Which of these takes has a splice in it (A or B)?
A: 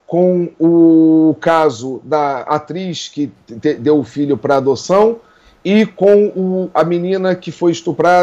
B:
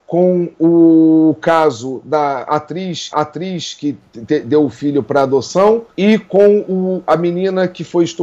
B